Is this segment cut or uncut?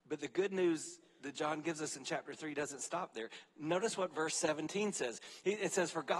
uncut